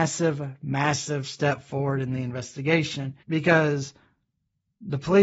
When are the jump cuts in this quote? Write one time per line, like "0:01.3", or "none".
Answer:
0:03.2

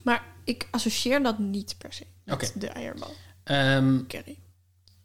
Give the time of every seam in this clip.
none

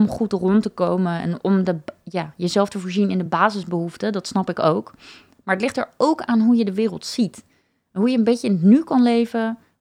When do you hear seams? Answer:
none

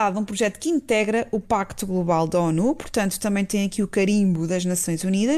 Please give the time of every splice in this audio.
none

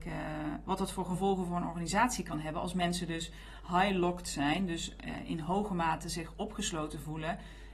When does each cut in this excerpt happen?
none

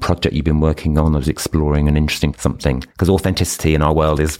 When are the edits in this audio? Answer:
0:02.3
0:02.9

